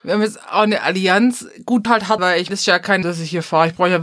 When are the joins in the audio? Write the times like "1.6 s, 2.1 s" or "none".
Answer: 1.9 s, 2.2 s, 2.5 s, 3.0 s